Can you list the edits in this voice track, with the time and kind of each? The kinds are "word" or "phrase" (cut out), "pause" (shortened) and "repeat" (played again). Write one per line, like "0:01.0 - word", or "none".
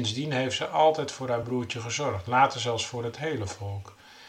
none